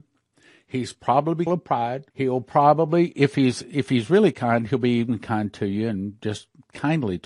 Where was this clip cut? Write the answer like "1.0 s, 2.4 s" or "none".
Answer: 1.5 s, 2.1 s

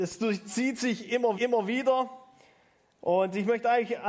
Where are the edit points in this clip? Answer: 1.3 s

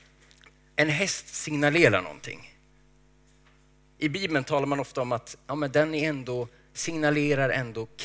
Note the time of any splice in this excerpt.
none

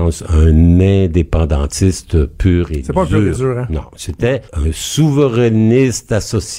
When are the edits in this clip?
4.5 s

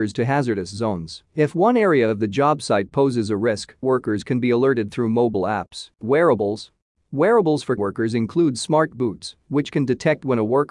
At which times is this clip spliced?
1.3 s, 3.8 s, 5.9 s, 7.8 s

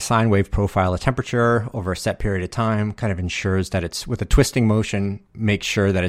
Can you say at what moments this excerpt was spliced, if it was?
none

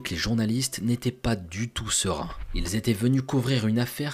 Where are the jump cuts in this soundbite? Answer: none

